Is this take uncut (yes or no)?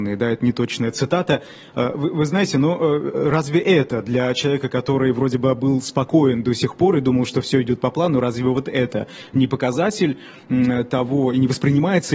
yes